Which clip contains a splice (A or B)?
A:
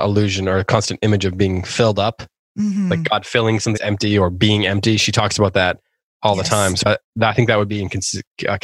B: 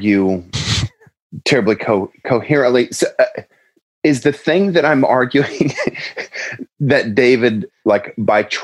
A